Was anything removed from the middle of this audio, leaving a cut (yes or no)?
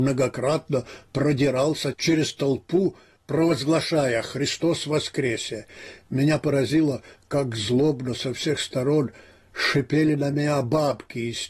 no